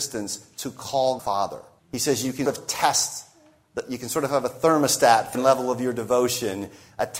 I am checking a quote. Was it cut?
yes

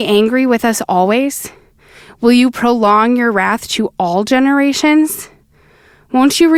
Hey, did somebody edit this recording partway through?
no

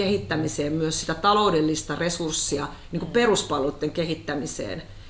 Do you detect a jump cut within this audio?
no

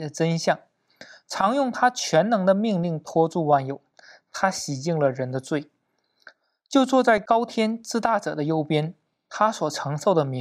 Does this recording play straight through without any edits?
yes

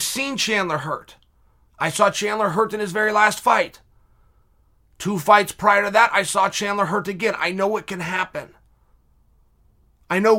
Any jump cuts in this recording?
no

